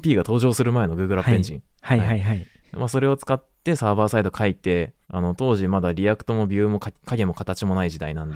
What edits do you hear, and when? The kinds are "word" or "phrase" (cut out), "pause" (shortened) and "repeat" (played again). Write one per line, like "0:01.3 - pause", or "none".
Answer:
0:05.0 - pause

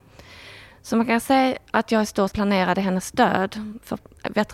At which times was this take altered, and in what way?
0:02.3 - word

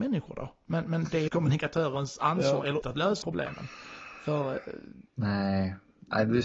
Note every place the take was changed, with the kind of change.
0:01.3 - word
0:02.8 - word
0:03.2 - word
0:05.1 - pause

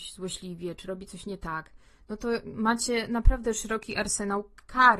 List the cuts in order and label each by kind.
none

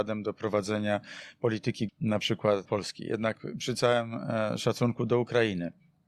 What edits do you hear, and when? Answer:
0:01.9 - word
0:02.7 - word

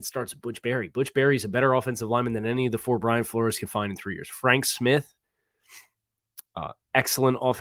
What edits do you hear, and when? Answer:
none

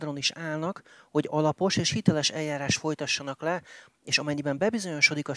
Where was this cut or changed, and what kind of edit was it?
none

